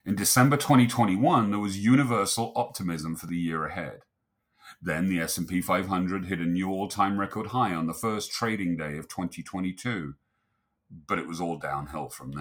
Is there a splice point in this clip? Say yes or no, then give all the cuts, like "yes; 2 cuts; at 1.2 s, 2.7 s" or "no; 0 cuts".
no; 0 cuts